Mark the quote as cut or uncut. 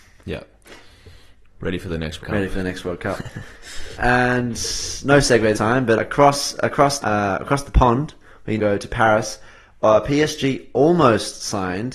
cut